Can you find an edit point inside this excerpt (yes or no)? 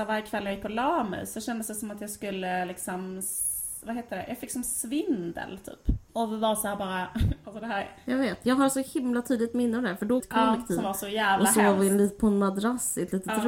yes